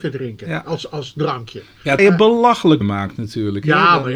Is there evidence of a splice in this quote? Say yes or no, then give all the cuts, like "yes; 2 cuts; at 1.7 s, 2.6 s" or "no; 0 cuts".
yes; 2 cuts; at 2.0 s, 2.8 s